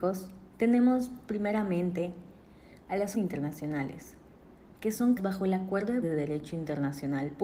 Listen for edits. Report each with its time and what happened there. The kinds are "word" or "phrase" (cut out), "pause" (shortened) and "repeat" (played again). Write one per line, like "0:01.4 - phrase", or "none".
0:03.1 - word
0:05.2 - word
0:06.0 - word